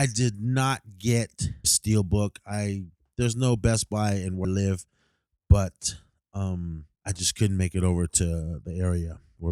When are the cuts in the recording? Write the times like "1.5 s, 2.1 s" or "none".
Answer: 1.6 s, 4.4 s, 6.9 s